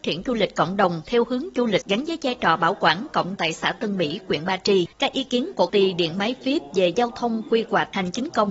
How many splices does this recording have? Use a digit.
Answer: 4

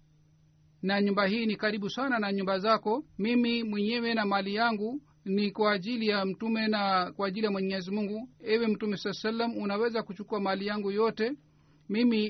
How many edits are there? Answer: 3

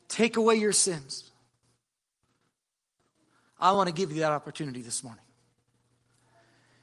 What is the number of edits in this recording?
0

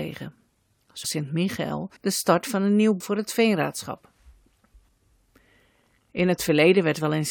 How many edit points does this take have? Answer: 3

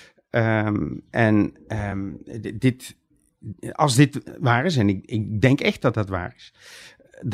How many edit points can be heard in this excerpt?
0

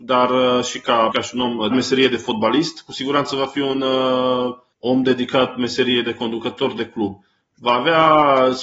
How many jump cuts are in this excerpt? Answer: 2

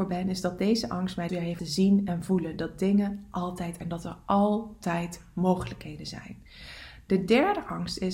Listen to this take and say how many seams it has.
3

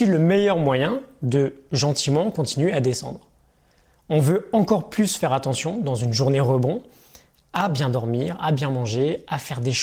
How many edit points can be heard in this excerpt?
0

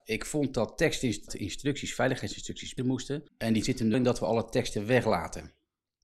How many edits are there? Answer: 5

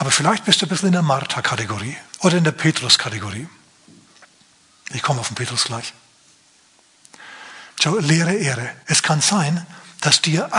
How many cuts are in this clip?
2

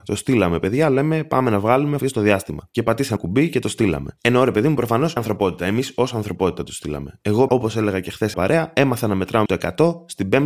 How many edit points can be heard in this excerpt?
6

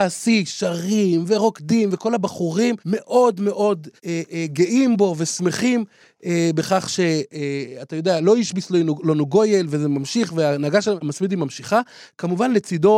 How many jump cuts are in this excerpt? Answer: 2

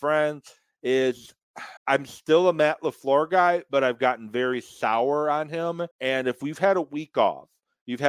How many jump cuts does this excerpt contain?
2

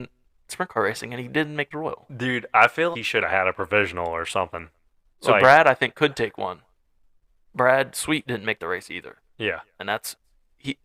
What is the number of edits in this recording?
2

